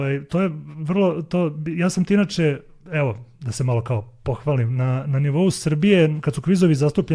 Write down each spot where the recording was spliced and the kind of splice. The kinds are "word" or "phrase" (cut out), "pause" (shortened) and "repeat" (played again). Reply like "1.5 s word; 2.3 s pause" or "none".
none